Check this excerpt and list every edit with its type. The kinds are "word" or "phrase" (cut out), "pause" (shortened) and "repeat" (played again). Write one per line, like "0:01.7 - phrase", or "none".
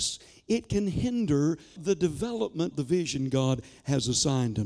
0:01.8 - word
0:02.7 - word